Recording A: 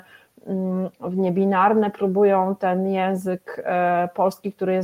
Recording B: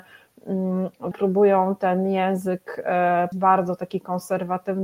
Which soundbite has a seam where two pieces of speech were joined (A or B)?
B